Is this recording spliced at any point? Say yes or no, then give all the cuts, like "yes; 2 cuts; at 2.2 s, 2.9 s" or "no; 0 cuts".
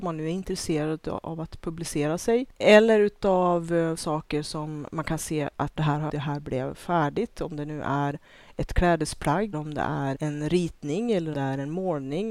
yes; 6 cuts; at 4.0 s, 5.8 s, 6.1 s, 9.5 s, 10.1 s, 11.3 s